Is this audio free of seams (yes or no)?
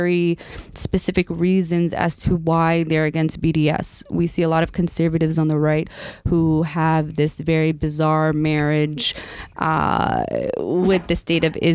yes